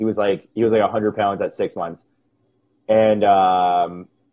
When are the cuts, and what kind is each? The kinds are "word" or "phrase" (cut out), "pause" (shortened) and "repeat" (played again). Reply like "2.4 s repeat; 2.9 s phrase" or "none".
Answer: none